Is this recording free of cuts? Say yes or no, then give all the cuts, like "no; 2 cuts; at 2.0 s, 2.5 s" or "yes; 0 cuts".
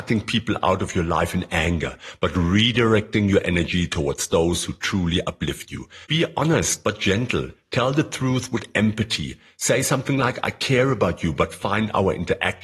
no; 1 cut; at 6.0 s